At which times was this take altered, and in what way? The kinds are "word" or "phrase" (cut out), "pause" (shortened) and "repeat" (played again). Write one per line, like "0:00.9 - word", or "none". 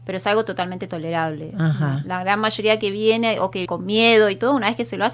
0:03.7 - word